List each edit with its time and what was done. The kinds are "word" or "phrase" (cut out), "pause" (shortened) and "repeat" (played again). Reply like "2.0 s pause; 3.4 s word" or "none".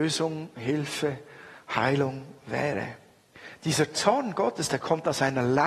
none